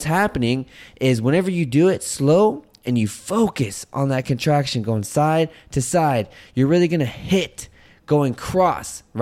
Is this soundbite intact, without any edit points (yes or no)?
yes